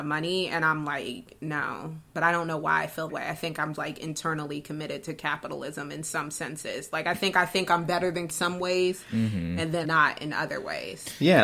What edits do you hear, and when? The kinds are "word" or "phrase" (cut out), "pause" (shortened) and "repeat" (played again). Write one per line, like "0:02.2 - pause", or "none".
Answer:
0:02.1 - pause
0:03.1 - word
0:03.7 - word
0:08.3 - phrase
0:09.8 - word